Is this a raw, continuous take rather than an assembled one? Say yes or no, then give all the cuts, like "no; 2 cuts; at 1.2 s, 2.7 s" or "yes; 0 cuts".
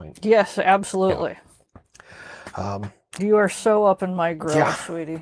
no; 1 cut; at 3.2 s